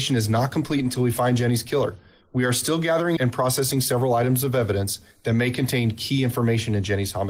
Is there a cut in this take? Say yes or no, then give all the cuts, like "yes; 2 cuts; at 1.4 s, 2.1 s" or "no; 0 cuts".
yes; 1 cut; at 3.2 s